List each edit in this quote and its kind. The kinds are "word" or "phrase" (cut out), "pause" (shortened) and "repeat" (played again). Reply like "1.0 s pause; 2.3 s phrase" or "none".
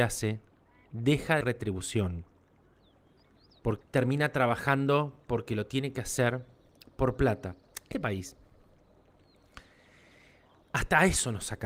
1.4 s word; 3.8 s word; 7.9 s word